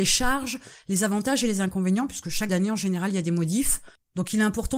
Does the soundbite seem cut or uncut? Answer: cut